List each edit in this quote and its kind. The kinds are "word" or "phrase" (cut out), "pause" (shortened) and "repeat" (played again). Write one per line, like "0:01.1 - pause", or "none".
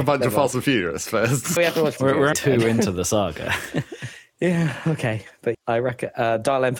0:01.6 - word
0:02.0 - word
0:02.3 - word
0:05.5 - word